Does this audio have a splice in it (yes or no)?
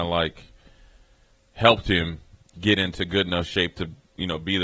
no